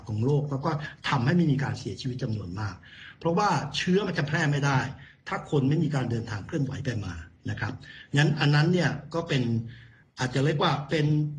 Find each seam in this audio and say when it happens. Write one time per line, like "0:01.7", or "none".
0:10.0